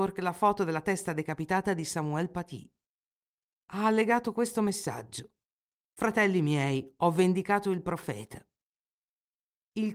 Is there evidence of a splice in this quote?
no; 0 cuts

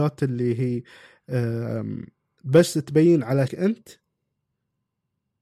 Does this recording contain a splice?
yes; 1 cut; at 3.5 s

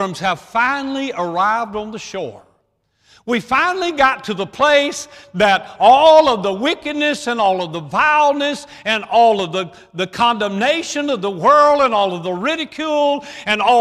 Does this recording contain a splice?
no; 0 cuts

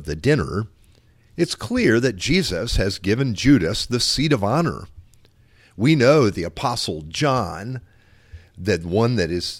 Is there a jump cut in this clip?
no; 0 cuts

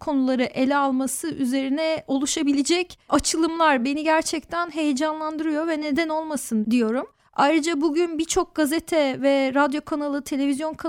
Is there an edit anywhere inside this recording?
no; 0 cuts

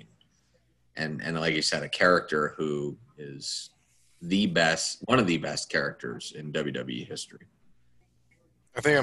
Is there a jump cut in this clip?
no; 0 cuts

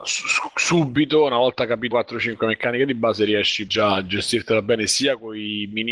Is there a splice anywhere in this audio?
yes; 2 cuts; at 1.9 s, 3.7 s

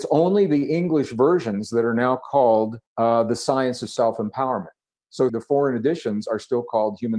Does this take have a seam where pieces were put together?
yes; 2 cuts; at 2.9 s, 5.3 s

